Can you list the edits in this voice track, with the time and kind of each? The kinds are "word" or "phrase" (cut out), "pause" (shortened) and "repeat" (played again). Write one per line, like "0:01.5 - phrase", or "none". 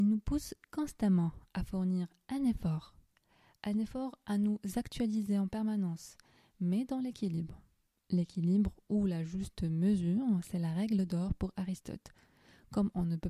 none